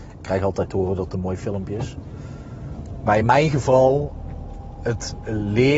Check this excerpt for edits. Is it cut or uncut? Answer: uncut